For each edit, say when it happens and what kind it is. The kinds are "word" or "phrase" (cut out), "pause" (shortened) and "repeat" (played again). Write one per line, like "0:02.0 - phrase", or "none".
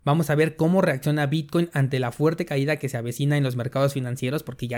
none